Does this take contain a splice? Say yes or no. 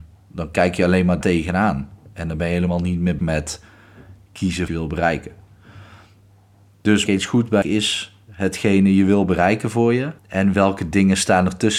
yes